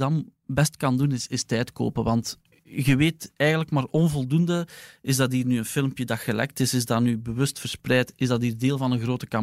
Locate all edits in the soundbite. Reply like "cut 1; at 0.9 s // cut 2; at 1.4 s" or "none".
none